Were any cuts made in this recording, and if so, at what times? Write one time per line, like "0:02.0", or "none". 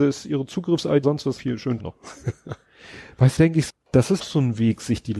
0:01.0
0:01.4
0:01.8
0:03.4
0:03.7
0:04.2